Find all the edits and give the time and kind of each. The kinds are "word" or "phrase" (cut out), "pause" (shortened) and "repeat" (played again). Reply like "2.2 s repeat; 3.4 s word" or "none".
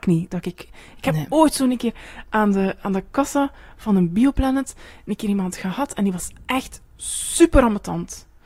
none